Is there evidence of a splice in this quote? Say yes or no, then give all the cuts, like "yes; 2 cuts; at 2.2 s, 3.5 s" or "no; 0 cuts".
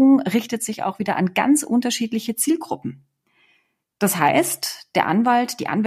no; 0 cuts